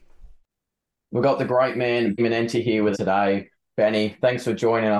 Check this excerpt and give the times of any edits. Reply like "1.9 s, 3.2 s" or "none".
2.2 s, 2.9 s